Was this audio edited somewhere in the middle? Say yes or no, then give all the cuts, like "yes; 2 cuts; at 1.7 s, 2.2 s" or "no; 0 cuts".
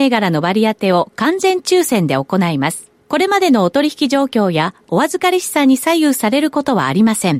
yes; 1 cut; at 3.0 s